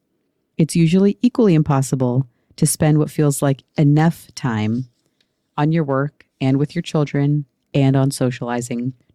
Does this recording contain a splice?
no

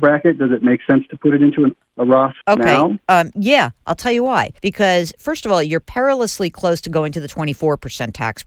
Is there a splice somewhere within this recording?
yes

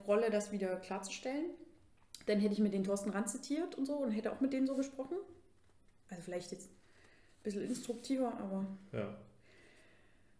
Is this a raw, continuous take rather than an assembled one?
yes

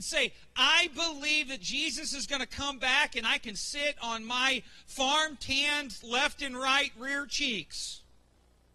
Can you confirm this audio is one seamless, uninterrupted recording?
yes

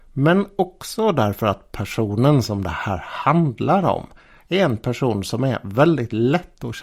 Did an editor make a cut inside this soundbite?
no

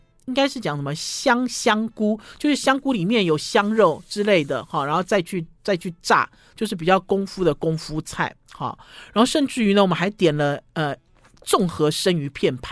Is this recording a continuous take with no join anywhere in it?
yes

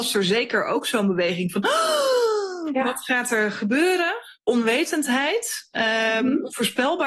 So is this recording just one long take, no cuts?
no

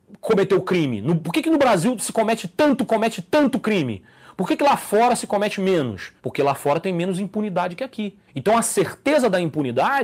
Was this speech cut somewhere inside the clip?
yes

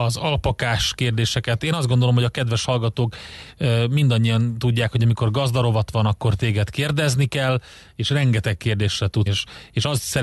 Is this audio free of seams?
no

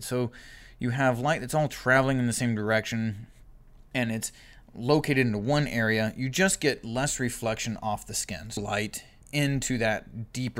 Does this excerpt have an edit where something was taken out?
yes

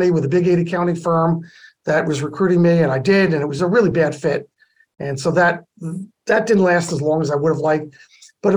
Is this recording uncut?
yes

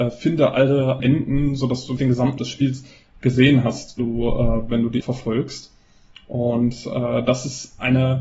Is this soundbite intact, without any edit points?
no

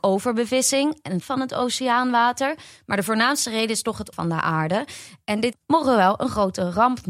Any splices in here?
yes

